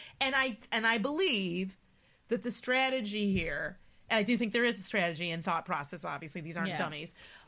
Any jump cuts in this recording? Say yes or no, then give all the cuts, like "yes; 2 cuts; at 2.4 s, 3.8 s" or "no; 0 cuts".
no; 0 cuts